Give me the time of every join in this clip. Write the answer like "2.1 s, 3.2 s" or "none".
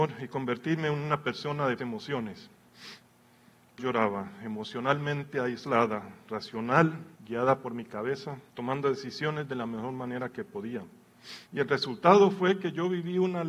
1.8 s, 3.8 s, 7.2 s, 8.5 s, 11.5 s